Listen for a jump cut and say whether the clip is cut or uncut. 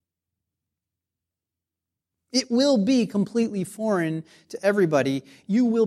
uncut